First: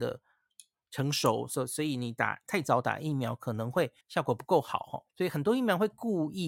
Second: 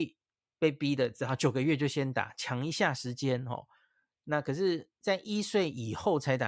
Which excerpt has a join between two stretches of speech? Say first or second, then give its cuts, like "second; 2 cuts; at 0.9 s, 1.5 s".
first; 2 cuts; at 4.0 s, 5.1 s